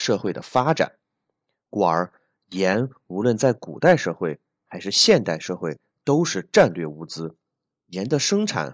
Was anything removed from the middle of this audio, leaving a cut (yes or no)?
no